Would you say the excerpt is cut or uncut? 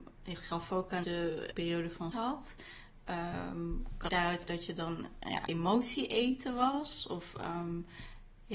cut